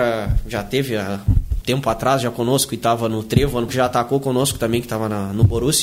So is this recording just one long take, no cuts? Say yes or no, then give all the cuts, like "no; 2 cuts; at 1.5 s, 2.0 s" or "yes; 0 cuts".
no; 2 cuts; at 1.6 s, 3.7 s